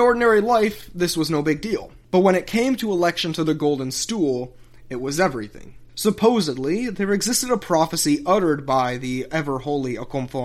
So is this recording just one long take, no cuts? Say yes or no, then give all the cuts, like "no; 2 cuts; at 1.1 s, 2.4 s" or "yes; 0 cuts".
yes; 0 cuts